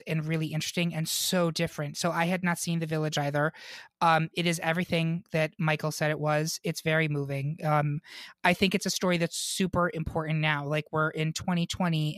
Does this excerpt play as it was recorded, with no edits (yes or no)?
yes